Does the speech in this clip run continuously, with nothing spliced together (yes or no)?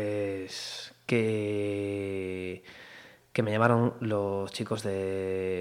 yes